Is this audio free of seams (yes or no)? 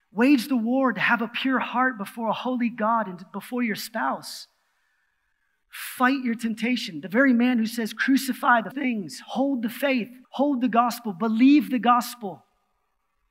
no